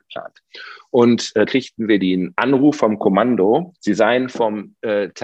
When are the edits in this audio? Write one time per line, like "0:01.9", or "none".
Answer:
0:01.4
0:03.8